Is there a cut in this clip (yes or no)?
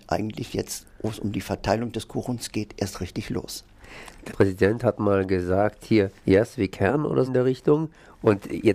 yes